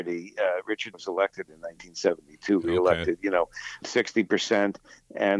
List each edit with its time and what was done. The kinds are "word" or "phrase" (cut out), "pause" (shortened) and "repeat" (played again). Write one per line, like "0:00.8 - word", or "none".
0:00.9 - word
0:01.5 - phrase
0:03.8 - word